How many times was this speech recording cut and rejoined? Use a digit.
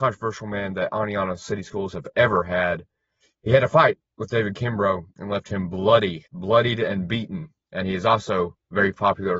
3